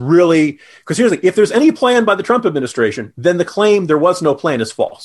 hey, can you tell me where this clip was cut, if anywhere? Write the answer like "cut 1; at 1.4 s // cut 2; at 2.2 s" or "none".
none

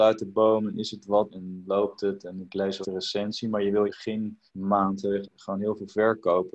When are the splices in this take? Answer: cut 1; at 1.3 s // cut 2; at 2.8 s // cut 3; at 3.9 s // cut 4; at 4.5 s // cut 5; at 5.2 s

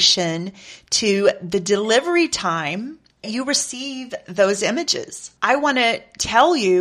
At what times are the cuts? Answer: cut 1; at 3.2 s // cut 2; at 5.4 s

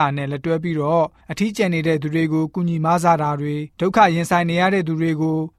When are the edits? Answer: cut 1; at 3.7 s

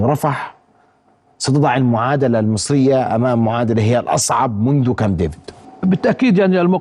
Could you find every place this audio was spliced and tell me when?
none

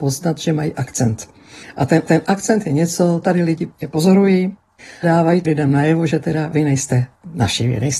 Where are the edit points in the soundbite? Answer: cut 1; at 2.1 s // cut 2; at 3.2 s // cut 3; at 3.8 s // cut 4; at 5.0 s // cut 5; at 5.4 s // cut 6; at 6.5 s

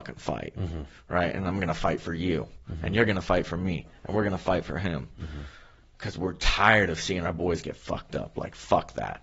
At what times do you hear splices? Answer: none

